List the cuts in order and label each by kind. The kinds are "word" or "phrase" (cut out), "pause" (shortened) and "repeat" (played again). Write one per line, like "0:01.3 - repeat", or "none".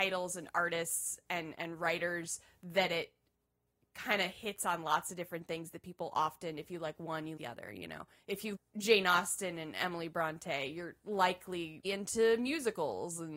0:07.4 - word
0:08.5 - word
0:11.8 - word